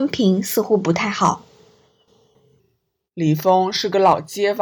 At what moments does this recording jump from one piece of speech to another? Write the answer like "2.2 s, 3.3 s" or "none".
none

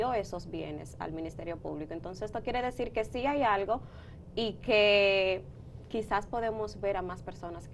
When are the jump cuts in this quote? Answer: none

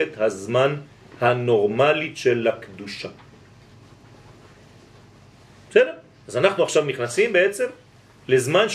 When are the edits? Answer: none

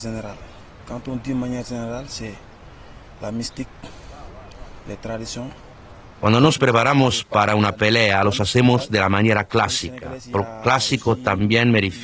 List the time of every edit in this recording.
none

